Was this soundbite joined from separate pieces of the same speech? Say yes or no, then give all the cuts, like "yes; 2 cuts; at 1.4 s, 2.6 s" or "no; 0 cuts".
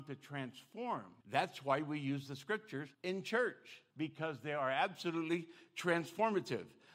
yes; 3 cuts; at 1.2 s, 2.9 s, 3.9 s